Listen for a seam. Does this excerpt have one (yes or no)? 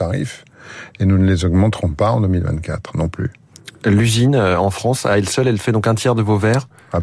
no